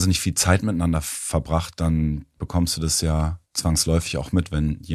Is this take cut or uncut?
cut